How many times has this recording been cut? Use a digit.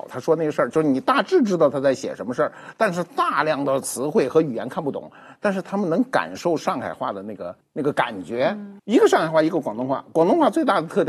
2